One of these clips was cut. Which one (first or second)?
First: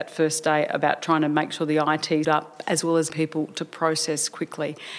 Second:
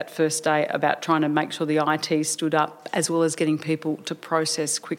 first